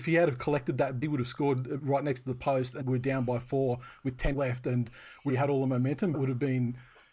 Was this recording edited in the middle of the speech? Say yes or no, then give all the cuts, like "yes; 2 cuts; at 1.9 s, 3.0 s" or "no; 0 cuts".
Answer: yes; 5 cuts; at 1.0 s, 2.8 s, 4.3 s, 5.3 s, 6.1 s